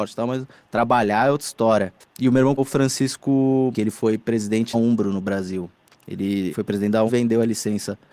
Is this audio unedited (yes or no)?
no